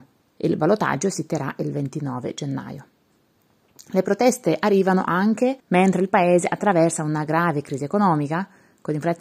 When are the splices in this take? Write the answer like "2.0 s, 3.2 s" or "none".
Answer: 5.6 s